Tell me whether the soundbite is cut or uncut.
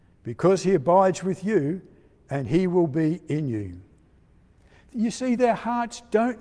uncut